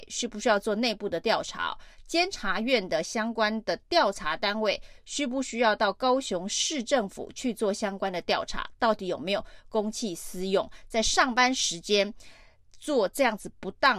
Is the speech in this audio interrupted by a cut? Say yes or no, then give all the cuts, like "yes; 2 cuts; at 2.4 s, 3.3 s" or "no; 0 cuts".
no; 0 cuts